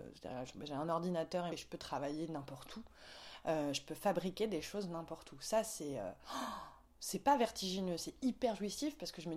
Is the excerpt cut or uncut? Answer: cut